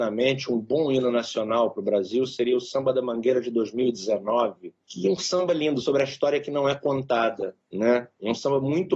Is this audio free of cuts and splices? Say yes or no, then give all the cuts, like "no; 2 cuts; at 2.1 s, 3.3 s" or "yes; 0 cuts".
yes; 0 cuts